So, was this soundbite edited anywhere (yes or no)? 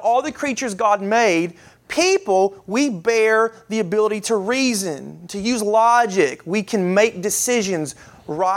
no